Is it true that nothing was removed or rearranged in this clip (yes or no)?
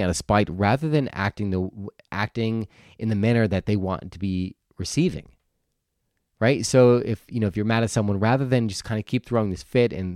yes